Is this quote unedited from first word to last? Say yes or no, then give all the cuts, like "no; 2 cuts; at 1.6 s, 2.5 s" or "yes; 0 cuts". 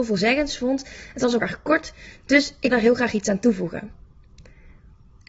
no; 2 cuts; at 1.4 s, 2.7 s